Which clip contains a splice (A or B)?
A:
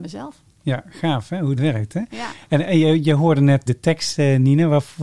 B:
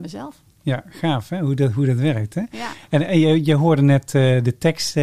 A